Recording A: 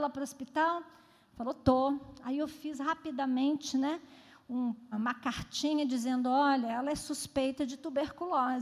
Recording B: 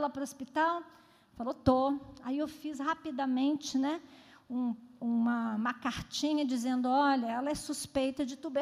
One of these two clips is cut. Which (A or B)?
A